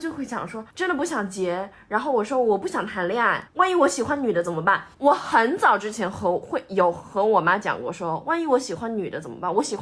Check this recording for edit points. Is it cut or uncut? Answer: cut